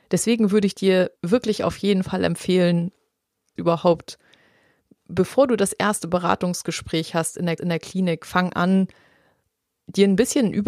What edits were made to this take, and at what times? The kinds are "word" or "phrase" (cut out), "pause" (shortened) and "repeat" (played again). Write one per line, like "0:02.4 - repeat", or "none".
0:01.2 - pause
0:03.6 - phrase
0:07.6 - repeat